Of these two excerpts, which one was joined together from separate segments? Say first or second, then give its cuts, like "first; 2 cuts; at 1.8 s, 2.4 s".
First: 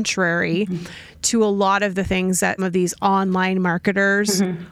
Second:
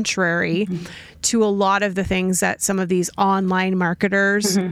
first; 1 cut; at 2.6 s